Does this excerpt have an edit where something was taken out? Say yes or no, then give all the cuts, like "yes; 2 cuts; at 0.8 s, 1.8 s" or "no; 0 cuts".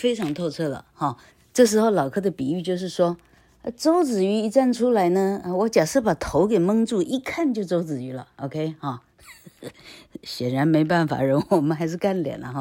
yes; 2 cuts; at 1.3 s, 9.7 s